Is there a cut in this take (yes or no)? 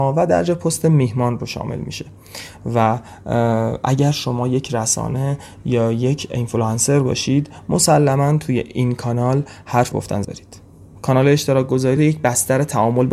yes